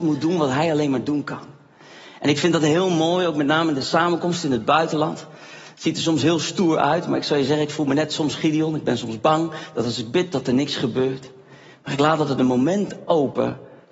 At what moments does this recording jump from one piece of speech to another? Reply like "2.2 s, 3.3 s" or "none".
none